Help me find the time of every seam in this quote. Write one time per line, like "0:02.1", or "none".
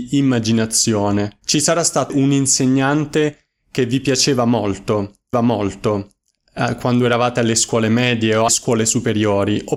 0:01.4
0:02.1
0:05.3
0:08.5